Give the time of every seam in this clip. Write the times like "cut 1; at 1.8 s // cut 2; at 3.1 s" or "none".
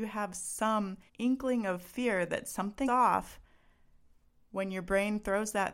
cut 1; at 1.1 s // cut 2; at 2.9 s